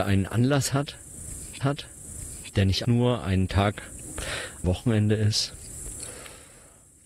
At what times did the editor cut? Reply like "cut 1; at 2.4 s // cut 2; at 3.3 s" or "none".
cut 1; at 1.6 s // cut 2; at 2.8 s // cut 3; at 4.6 s